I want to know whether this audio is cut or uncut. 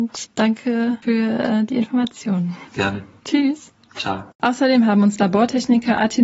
cut